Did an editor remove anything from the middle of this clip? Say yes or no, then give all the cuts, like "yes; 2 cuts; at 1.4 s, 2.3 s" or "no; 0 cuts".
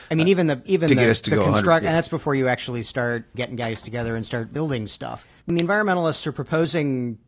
yes; 2 cuts; at 3.3 s, 5.4 s